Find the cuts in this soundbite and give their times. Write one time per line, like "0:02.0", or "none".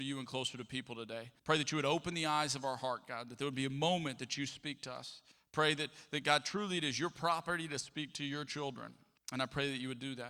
0:01.4
0:05.3
0:09.2